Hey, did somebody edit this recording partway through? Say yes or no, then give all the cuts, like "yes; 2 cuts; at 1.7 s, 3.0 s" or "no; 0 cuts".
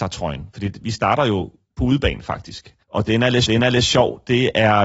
yes; 2 cuts; at 2.8 s, 3.5 s